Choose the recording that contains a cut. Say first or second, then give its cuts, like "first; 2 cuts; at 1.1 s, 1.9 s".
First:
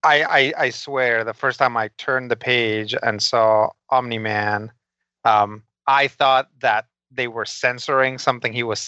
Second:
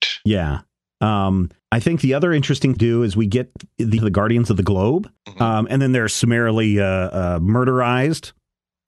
second; 4 cuts; at 1.6 s, 2.8 s, 4.0 s, 5.2 s